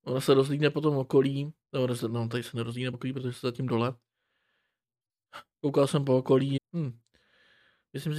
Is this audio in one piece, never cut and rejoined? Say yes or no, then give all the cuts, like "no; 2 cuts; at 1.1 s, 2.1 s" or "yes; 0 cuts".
no; 3 cuts; at 1.6 s, 2.9 s, 6.6 s